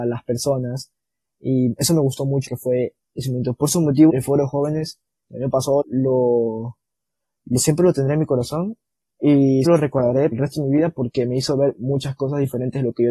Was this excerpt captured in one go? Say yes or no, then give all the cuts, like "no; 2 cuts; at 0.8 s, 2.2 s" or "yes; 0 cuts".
no; 5 cuts; at 2.5 s, 4.1 s, 5.8 s, 9.6 s, 10.3 s